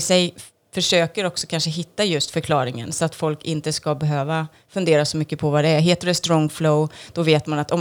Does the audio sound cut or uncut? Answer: uncut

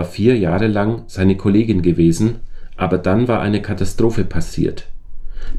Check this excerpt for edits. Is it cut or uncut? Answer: uncut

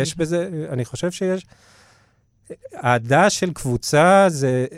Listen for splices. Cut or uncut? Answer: uncut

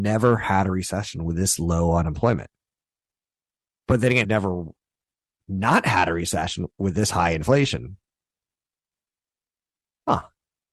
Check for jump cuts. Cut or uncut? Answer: cut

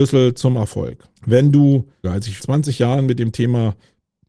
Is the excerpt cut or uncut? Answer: cut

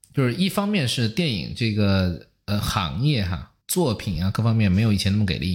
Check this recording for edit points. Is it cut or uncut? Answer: cut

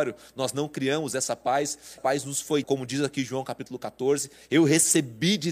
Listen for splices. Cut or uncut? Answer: cut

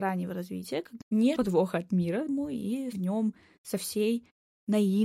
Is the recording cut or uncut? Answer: cut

